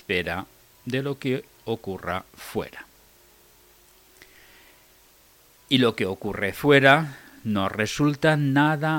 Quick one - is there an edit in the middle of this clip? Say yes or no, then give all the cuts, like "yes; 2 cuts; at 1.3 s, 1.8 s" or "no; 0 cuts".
no; 0 cuts